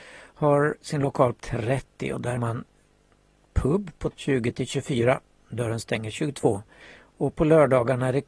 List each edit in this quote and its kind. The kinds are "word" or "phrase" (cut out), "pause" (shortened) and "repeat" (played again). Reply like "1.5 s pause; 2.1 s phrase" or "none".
1.4 s word; 2.4 s word; 4.1 s word